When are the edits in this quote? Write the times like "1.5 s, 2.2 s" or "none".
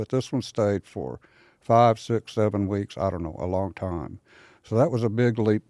none